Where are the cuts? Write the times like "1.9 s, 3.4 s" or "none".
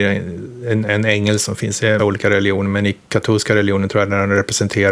2.0 s